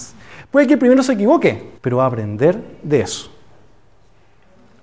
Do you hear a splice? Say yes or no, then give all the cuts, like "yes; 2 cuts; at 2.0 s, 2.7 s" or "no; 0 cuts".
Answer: yes; 1 cut; at 1.8 s